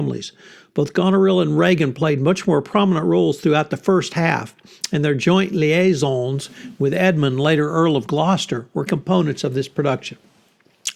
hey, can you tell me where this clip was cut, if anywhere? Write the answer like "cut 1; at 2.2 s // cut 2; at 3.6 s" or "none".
cut 1; at 8.9 s